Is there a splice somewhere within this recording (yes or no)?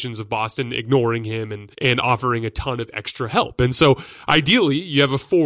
yes